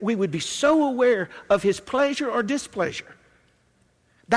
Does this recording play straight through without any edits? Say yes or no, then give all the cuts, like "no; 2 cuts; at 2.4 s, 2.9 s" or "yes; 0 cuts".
yes; 0 cuts